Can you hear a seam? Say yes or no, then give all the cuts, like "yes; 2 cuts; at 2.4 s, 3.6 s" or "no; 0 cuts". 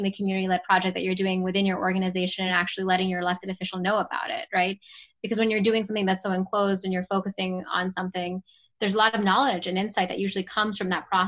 no; 0 cuts